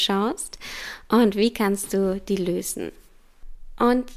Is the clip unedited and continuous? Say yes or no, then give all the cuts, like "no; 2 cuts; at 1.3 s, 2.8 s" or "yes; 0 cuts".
yes; 0 cuts